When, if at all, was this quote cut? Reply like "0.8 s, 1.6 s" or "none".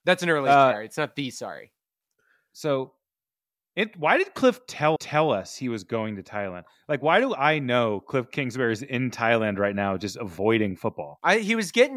5.0 s